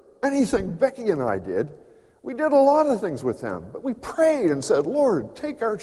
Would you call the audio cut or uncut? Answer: uncut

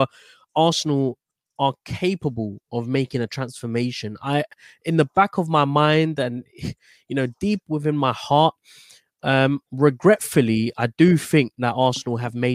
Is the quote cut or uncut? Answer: uncut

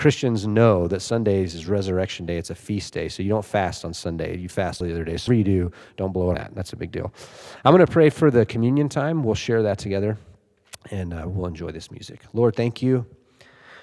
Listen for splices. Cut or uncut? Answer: cut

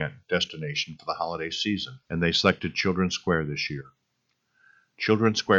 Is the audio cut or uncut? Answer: cut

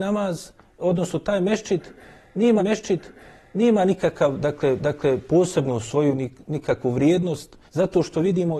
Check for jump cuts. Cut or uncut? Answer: cut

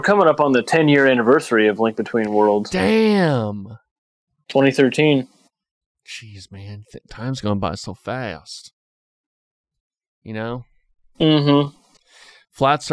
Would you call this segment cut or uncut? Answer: uncut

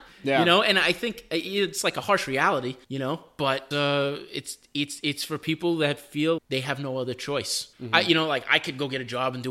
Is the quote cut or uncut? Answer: cut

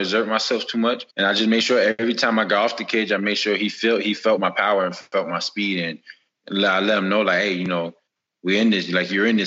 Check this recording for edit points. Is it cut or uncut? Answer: cut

